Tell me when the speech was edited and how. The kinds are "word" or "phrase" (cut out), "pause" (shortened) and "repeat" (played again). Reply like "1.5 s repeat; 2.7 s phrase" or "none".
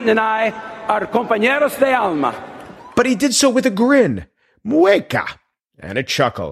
none